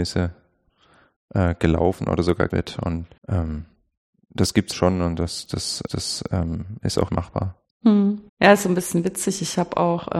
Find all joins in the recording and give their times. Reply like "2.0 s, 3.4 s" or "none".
2.5 s, 3.2 s, 4.7 s, 5.9 s, 7.1 s, 8.3 s